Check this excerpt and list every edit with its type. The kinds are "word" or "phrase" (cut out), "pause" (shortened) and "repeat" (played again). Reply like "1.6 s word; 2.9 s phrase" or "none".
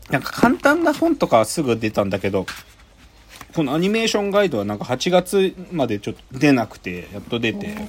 6.2 s pause